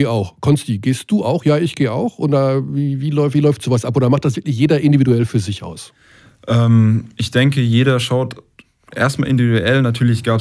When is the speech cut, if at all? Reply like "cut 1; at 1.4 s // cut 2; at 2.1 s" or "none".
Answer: none